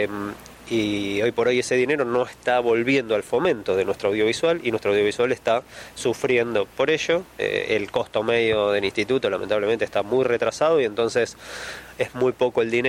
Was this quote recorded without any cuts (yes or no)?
no